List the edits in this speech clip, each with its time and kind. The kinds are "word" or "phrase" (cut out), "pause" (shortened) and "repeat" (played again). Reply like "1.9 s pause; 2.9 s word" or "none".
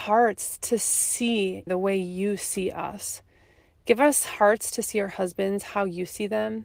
1.7 s phrase